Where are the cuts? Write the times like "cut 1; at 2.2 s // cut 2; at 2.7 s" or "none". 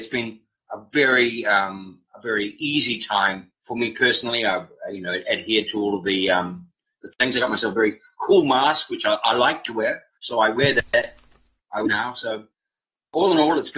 cut 1; at 3.6 s // cut 2; at 7.1 s